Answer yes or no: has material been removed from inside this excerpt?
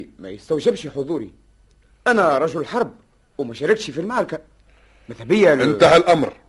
no